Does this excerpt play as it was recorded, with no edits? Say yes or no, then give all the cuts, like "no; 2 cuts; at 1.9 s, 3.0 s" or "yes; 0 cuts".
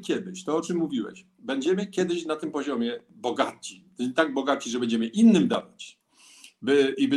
yes; 0 cuts